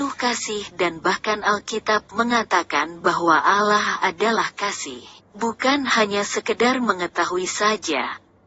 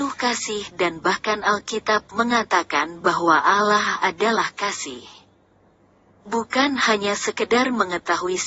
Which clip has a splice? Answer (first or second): first